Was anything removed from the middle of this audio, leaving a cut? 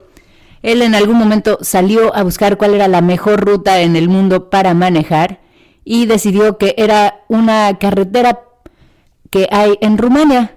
no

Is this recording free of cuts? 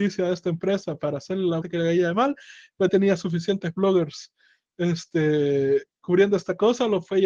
no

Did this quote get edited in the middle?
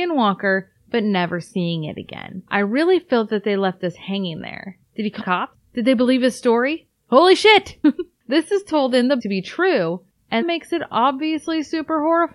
yes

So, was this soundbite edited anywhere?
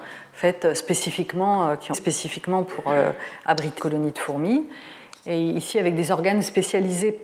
yes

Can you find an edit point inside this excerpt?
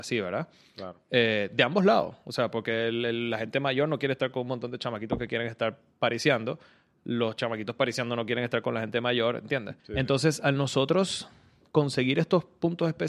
yes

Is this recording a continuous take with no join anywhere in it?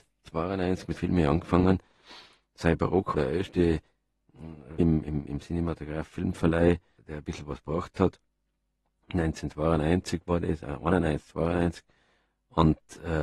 no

